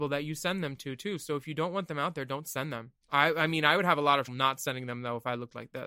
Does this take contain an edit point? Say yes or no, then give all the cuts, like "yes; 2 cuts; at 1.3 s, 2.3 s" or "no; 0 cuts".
yes; 2 cuts; at 3.0 s, 4.3 s